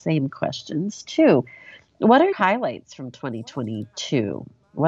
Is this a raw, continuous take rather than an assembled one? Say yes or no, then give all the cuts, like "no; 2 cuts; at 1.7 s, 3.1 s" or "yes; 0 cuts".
no; 1 cut; at 2.3 s